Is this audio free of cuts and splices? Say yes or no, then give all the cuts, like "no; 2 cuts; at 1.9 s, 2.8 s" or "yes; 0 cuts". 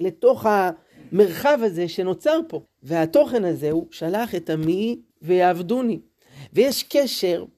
no; 2 cuts; at 2.7 s, 5.1 s